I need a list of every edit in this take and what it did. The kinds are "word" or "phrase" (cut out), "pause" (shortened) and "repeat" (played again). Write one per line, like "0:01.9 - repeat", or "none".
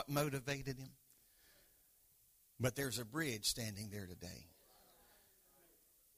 none